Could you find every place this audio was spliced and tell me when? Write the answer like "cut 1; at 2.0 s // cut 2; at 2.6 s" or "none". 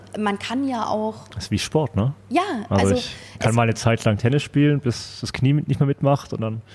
none